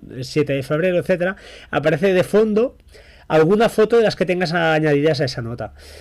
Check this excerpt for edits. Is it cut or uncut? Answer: uncut